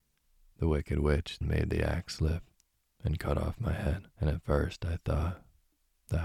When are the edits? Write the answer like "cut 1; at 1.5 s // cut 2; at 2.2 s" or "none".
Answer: cut 1; at 1.4 s // cut 2; at 4.1 s